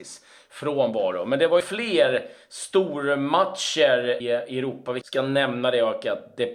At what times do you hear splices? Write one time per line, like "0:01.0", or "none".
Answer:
0:01.6
0:04.2
0:05.0